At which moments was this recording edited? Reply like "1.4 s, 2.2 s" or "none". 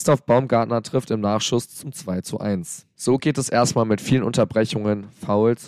none